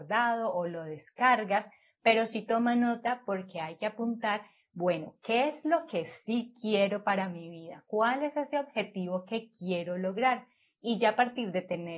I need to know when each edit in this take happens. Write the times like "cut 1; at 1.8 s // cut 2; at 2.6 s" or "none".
none